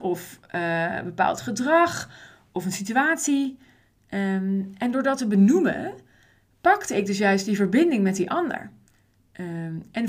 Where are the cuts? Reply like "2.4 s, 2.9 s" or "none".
none